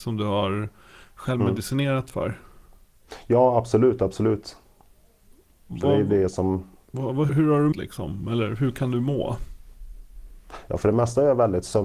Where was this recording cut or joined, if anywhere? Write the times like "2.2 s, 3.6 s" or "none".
7.3 s, 7.7 s

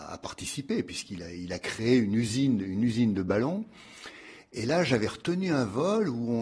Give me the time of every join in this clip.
none

